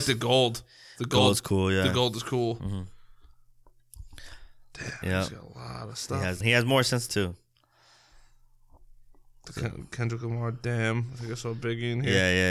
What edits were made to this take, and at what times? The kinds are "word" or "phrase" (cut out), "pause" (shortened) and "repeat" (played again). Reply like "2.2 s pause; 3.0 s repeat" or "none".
6.4 s phrase; 7.1 s word